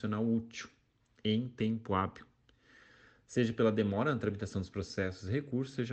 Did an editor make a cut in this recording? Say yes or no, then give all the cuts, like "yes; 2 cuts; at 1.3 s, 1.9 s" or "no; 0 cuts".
no; 0 cuts